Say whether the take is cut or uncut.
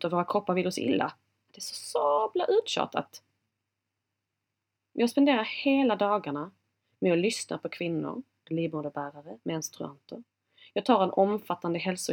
uncut